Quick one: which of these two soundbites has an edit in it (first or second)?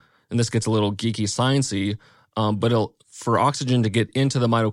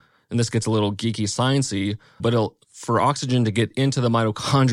second